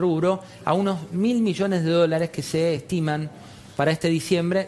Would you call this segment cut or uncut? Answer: uncut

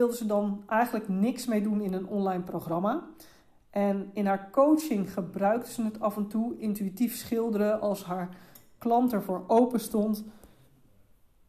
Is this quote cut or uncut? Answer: uncut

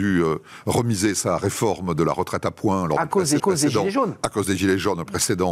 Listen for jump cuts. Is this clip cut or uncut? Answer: cut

